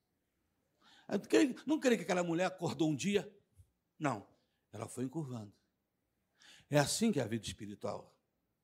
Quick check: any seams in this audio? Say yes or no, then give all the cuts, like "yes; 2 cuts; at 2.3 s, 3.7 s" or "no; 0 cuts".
no; 0 cuts